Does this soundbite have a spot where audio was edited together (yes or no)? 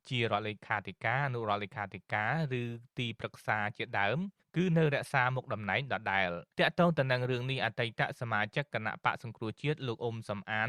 yes